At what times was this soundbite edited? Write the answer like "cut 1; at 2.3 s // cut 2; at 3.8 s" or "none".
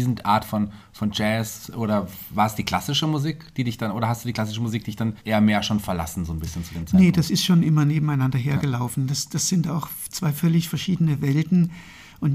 cut 1; at 5.2 s

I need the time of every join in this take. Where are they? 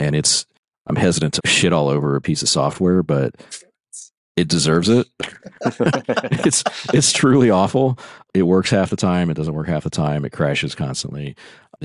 cut 1; at 1.4 s // cut 2; at 4.1 s

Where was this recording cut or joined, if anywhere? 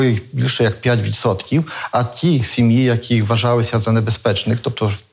none

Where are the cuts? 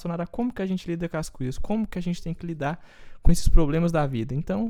none

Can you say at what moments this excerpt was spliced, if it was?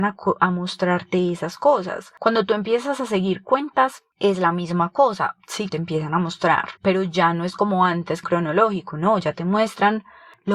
cut 1; at 4.1 s // cut 2; at 5.7 s // cut 3; at 6.8 s // cut 4; at 8.2 s

